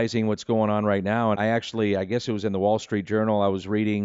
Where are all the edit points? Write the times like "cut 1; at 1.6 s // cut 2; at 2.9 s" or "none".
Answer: cut 1; at 1.3 s